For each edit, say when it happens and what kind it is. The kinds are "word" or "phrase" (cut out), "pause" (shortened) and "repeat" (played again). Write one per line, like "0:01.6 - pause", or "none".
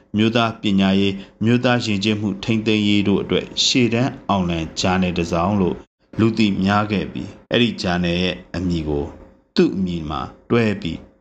0:07.4 - pause